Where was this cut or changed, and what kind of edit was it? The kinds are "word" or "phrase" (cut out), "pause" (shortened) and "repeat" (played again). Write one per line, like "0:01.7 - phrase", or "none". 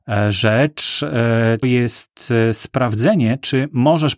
0:01.6 - word